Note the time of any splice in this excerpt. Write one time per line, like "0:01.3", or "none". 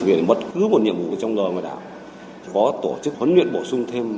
0:01.2
0:02.5
0:03.1